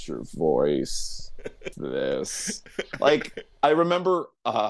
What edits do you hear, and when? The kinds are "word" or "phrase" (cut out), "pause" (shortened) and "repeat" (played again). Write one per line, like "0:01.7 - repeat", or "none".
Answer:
0:01.7 - word
0:03.5 - pause